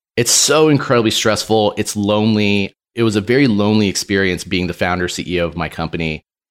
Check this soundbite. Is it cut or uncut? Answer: uncut